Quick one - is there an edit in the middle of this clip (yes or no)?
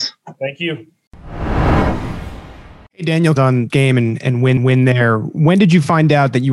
yes